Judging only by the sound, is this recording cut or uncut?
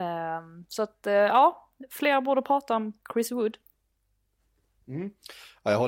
uncut